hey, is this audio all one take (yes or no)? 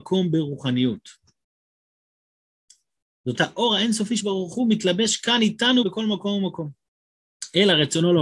no